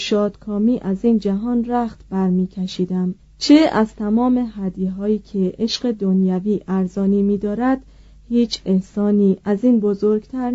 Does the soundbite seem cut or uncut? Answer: cut